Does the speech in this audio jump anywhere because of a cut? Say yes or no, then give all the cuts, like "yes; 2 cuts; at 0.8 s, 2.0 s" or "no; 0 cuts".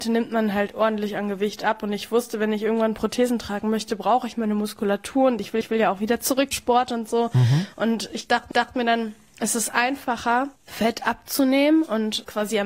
yes; 4 cuts; at 5.6 s, 6.5 s, 8.5 s, 10.6 s